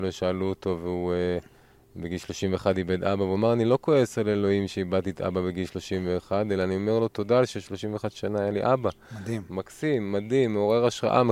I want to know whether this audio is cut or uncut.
uncut